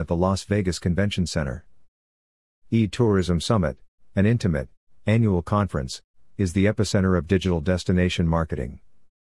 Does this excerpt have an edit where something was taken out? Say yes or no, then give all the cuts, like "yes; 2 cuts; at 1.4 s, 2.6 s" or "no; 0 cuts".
no; 0 cuts